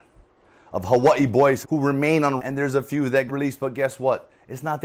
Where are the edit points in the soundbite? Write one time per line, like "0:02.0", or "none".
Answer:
0:01.6
0:02.4
0:03.3